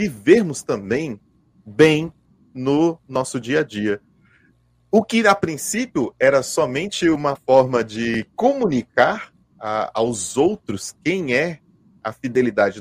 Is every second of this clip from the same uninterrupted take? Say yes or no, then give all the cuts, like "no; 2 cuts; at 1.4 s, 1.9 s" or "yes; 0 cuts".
yes; 0 cuts